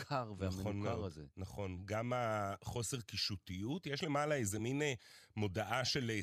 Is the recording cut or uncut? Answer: uncut